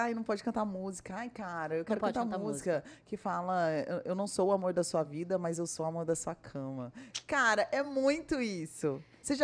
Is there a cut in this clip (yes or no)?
no